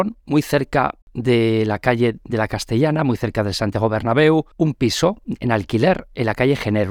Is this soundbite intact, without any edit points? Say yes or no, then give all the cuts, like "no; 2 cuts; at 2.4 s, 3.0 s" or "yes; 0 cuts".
no; 2 cuts; at 1.0 s, 4.5 s